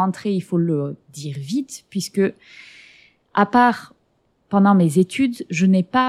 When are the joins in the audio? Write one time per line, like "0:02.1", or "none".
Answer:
none